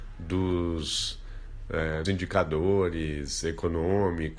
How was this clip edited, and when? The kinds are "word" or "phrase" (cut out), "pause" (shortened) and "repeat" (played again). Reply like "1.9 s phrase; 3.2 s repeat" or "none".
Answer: 2.1 s word